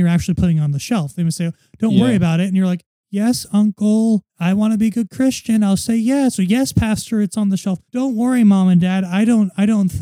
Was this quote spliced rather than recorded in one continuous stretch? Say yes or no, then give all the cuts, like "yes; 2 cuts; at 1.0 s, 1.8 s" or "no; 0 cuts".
yes; 2 cuts; at 4.3 s, 7.9 s